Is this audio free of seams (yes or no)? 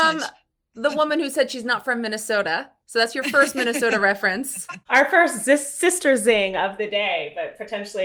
yes